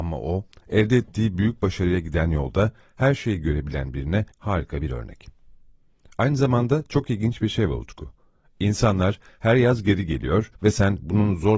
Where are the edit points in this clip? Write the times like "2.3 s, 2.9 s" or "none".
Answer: 4.3 s, 10.5 s